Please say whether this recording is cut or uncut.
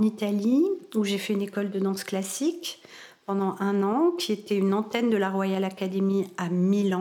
uncut